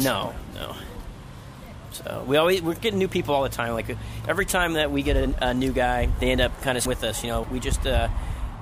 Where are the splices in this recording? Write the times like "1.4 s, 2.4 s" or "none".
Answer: 6.9 s, 7.4 s